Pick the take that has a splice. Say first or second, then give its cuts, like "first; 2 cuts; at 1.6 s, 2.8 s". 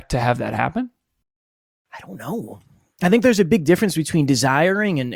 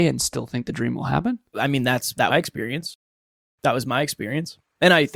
second; 2 cuts; at 1.5 s, 2.3 s